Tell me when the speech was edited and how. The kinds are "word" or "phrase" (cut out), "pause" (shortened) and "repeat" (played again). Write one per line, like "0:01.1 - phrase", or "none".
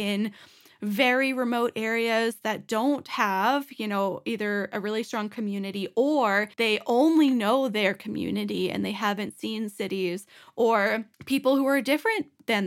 0:06.5 - pause
0:11.1 - pause